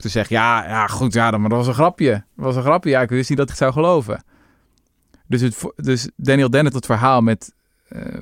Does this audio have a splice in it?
yes; 3 cuts; at 2.3 s, 3.5 s, 6.7 s

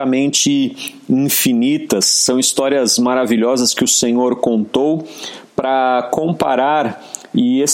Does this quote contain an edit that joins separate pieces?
no; 0 cuts

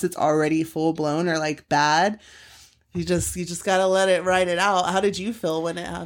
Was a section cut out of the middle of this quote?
no; 0 cuts

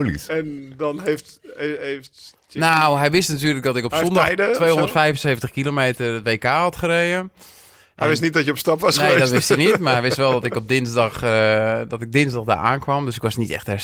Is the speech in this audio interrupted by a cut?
no; 0 cuts

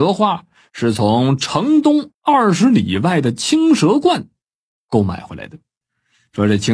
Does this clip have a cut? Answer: no; 0 cuts

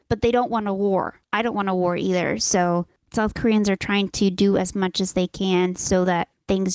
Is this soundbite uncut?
yes; 0 cuts

